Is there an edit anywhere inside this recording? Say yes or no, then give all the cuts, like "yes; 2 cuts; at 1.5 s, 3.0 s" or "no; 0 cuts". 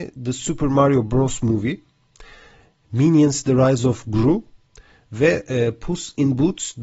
no; 0 cuts